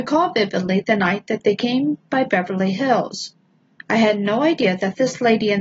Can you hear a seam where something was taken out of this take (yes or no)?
no